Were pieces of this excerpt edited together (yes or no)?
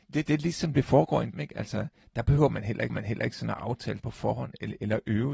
yes